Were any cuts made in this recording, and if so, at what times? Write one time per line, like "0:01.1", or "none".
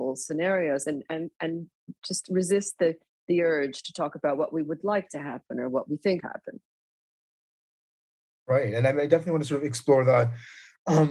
0:02.0
0:06.2

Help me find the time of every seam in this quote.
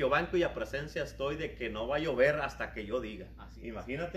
none

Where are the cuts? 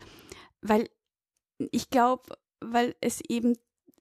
none

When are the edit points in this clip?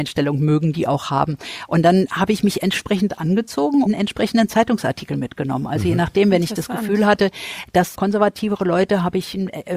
0:03.9
0:07.9

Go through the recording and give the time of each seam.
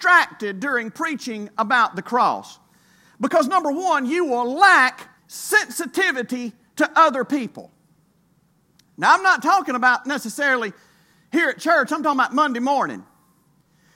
0:05.2

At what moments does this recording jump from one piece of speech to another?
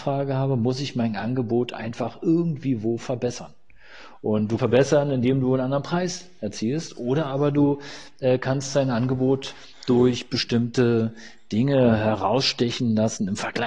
0:04.6

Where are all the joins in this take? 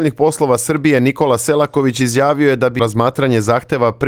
0:02.8

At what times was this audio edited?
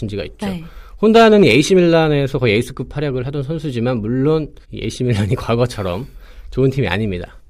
0:04.6

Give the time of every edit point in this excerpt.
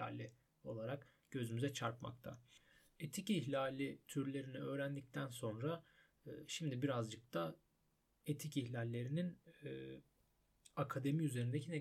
none

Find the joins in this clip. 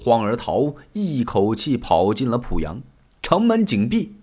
0:03.1

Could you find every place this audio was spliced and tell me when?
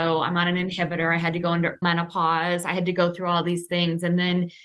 0:01.8

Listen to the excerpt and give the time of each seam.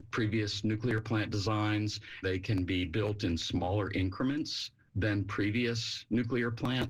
0:02.2

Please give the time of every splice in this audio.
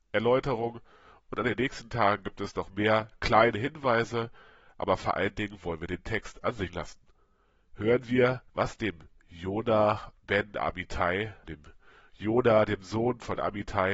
0:06.7
0:08.5
0:11.4

